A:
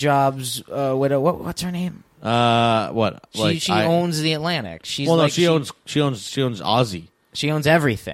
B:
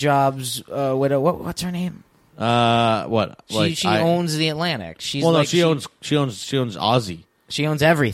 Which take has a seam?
A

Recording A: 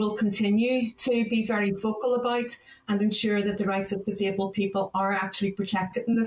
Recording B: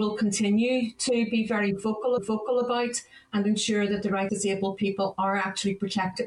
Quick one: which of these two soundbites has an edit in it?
B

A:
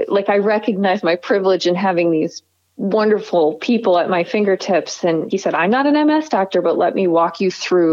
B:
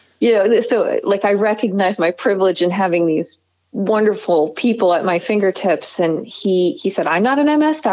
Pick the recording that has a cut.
A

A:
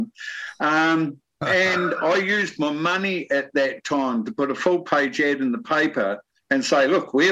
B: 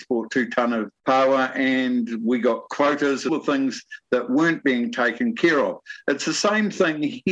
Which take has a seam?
B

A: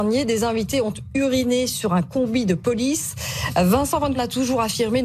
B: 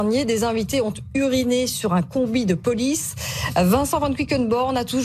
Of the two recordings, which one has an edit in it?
A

